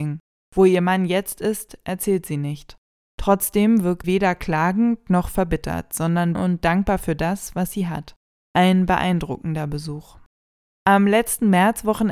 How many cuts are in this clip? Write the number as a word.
two